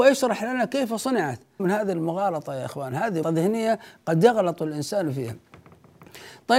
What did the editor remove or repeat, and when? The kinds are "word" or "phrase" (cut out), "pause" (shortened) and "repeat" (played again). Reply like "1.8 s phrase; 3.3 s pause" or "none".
1.6 s word; 3.2 s word